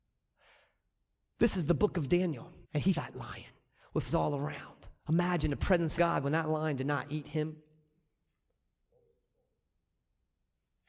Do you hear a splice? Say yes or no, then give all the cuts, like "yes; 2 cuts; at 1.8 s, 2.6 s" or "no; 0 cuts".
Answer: yes; 5 cuts; at 2.6 s, 2.9 s, 4.1 s, 5.0 s, 6.0 s